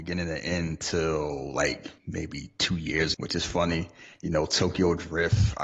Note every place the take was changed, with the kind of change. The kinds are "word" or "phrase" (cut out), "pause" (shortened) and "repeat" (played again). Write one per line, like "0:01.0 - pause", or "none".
0:02.0 - pause
0:03.1 - word